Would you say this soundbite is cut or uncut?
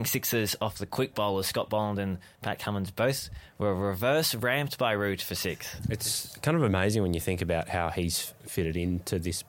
uncut